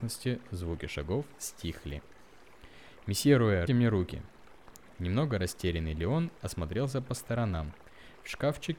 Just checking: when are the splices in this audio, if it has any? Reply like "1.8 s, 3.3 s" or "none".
1.4 s, 3.7 s